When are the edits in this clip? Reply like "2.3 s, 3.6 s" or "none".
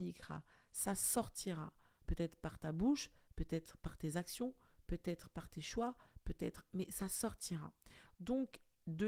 none